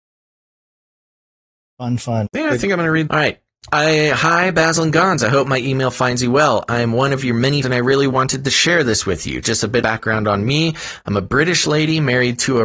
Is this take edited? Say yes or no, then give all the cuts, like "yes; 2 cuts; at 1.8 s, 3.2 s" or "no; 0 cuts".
yes; 4 cuts; at 2.3 s, 3.1 s, 7.6 s, 9.8 s